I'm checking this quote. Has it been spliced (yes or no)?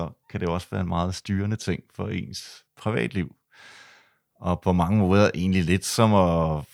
no